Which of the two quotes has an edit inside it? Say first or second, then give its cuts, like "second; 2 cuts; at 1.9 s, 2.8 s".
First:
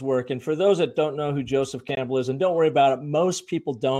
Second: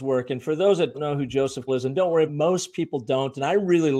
second; 3 cuts; at 0.9 s, 1.7 s, 2.3 s